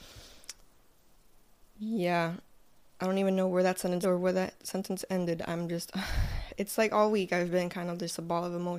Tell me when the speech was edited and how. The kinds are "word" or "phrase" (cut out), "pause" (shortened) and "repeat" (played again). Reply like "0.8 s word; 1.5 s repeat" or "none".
4.0 s word